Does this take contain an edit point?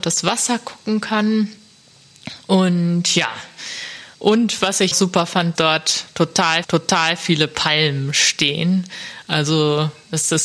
yes; 4 cuts; at 4.1 s, 4.9 s, 5.6 s, 6.6 s

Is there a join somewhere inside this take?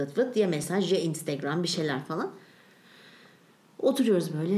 no; 0 cuts

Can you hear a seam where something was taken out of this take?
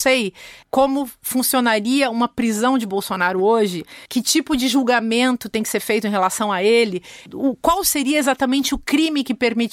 no; 0 cuts

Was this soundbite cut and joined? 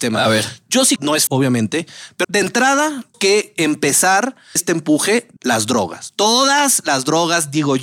yes; 6 cuts; at 1.0 s, 1.3 s, 2.2 s, 3.1 s, 4.6 s, 5.4 s

